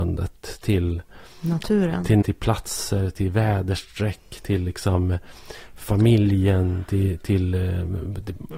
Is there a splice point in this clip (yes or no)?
yes